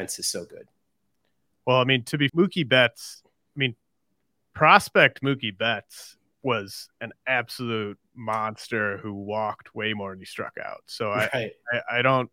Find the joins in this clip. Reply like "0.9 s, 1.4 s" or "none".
2.3 s, 6.3 s